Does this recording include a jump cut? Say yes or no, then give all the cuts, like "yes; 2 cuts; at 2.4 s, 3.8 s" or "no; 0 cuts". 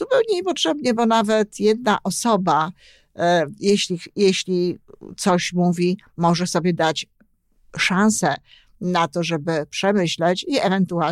no; 0 cuts